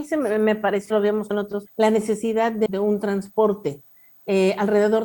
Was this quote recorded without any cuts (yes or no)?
no